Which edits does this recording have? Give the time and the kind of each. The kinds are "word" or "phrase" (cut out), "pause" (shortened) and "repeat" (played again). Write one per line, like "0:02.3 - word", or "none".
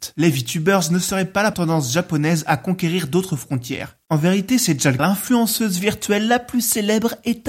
0:01.5 - word
0:05.0 - phrase